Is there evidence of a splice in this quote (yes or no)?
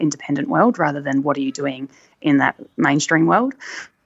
no